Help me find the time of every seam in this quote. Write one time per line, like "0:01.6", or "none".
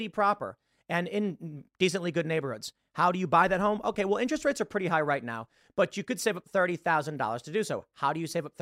none